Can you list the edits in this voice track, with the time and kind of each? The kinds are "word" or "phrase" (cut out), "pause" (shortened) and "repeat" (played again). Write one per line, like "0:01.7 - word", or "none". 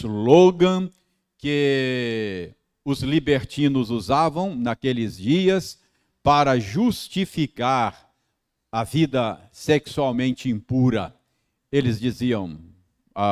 none